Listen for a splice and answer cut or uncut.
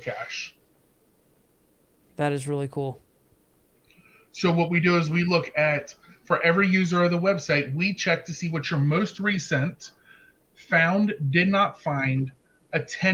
uncut